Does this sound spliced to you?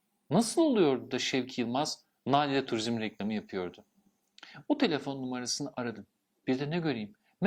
no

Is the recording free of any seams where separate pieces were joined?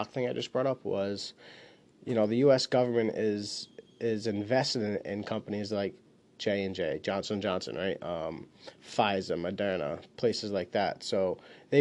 yes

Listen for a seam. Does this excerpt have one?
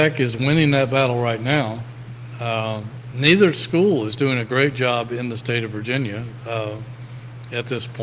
no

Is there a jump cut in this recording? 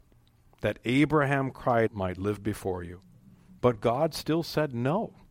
yes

